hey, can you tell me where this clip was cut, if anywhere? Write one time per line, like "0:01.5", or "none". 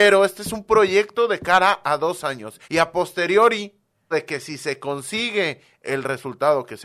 0:02.6
0:04.1